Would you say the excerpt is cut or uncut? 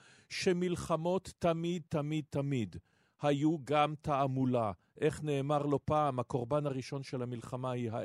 uncut